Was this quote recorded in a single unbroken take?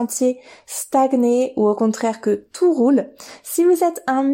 yes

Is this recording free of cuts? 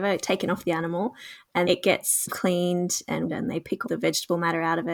no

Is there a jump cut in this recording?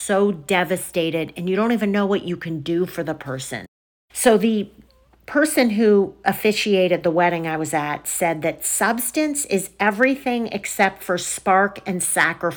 no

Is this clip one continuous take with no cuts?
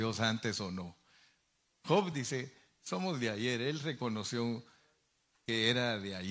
yes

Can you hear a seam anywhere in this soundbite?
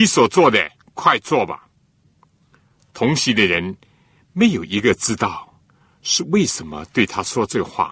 no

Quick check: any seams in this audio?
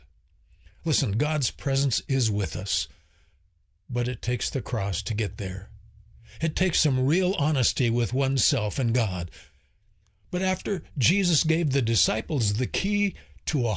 no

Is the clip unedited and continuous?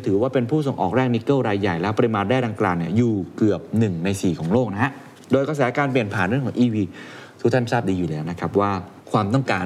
yes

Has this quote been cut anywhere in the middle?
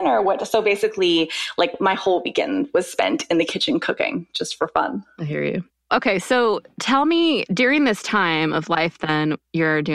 yes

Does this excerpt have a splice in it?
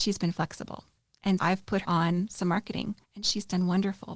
yes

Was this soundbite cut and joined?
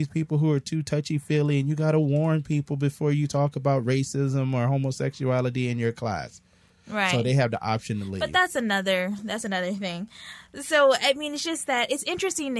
no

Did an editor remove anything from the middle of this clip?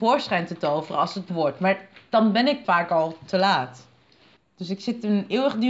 yes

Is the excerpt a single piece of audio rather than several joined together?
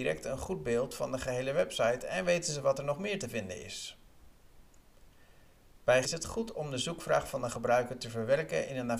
no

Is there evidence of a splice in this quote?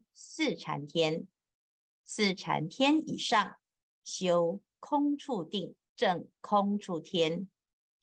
yes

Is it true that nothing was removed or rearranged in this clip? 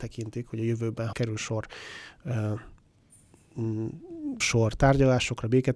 no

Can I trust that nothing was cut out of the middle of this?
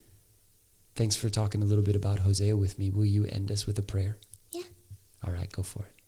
yes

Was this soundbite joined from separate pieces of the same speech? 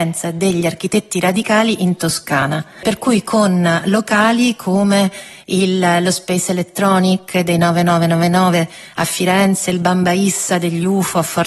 no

